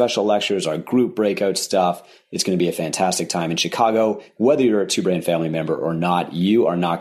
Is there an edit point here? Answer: no; 0 cuts

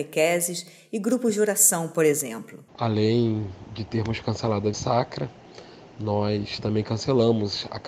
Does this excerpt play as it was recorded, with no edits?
no; 2 cuts; at 2.7 s, 4.7 s

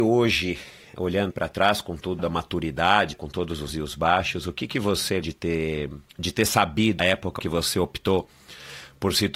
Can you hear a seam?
yes; 8 cuts; at 1.3 s, 2.2 s, 3.1 s, 3.7 s, 5.2 s, 6.1 s, 7.0 s, 7.4 s

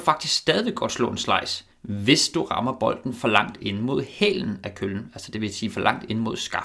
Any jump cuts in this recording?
yes; 1 cut; at 1.7 s

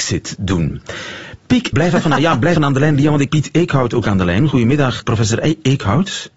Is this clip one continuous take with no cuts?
no; 5 cuts; at 1.7 s, 2.2 s, 2.6 s, 3.3 s, 5.0 s

